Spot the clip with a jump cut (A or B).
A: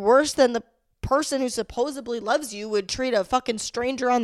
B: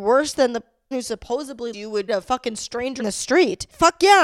B